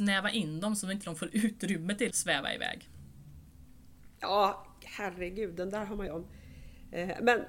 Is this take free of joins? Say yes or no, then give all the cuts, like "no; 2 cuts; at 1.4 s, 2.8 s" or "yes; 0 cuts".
no; 2 cuts; at 2.1 s, 6.1 s